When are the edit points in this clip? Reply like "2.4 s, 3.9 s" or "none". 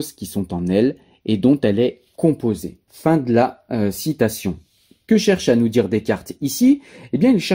none